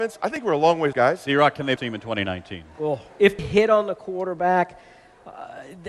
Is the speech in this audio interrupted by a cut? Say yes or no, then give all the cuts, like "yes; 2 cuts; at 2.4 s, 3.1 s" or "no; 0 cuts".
yes; 3 cuts; at 0.9 s, 1.8 s, 3.4 s